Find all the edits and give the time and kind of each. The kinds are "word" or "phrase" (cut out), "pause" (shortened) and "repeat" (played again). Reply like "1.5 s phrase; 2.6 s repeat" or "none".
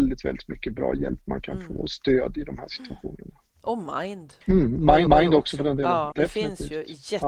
4.4 s pause; 5.1 s repeat; 6.1 s word